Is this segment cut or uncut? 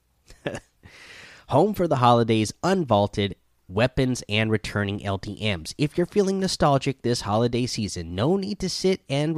uncut